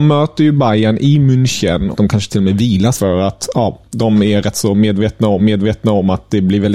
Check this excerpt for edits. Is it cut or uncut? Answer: cut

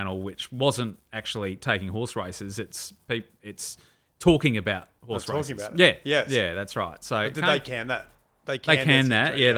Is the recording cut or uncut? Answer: uncut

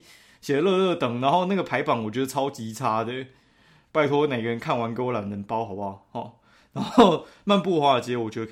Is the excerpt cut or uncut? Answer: uncut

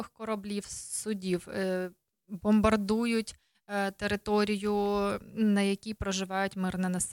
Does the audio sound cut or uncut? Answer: uncut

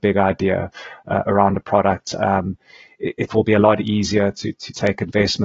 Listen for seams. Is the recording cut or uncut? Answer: uncut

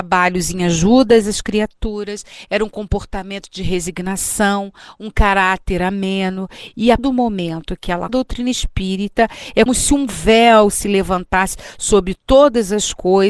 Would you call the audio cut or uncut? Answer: cut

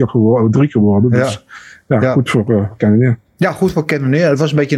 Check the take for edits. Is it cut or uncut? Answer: uncut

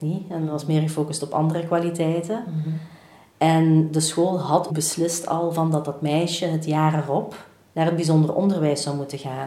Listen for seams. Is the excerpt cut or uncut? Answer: cut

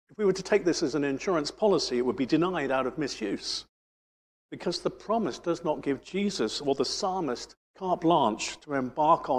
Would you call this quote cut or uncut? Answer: cut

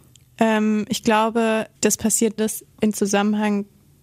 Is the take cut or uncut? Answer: cut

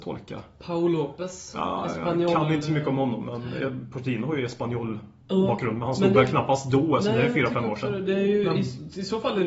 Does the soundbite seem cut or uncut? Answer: uncut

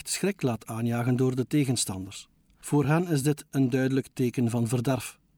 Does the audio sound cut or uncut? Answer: uncut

